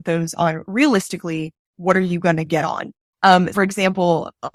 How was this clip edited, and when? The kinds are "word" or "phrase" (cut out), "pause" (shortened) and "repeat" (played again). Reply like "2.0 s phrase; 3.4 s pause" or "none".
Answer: 3.5 s word